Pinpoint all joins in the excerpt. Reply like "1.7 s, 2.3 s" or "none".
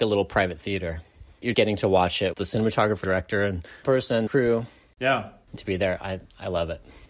1.5 s, 2.3 s, 3.0 s, 3.8 s, 4.3 s, 5.6 s